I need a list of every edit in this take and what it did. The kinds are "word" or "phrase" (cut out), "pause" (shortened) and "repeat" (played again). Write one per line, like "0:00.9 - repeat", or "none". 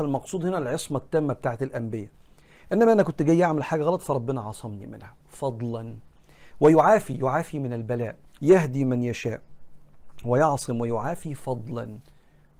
0:05.2 - pause
0:08.4 - word